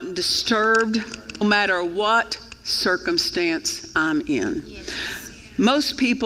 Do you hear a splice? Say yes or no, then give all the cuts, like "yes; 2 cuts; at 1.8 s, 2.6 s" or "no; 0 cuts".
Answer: yes; 1 cut; at 1.4 s